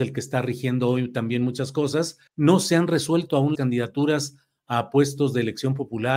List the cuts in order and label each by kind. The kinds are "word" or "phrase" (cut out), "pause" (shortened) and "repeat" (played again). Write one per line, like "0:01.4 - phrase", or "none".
0:02.3 - pause
0:03.5 - word